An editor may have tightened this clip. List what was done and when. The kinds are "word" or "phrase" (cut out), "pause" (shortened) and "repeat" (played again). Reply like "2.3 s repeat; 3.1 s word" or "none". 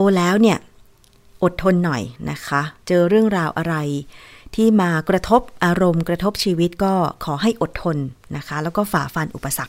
2.8 s pause